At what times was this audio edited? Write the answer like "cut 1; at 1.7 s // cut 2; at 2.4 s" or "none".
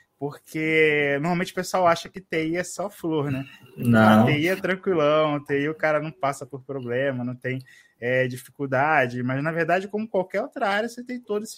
none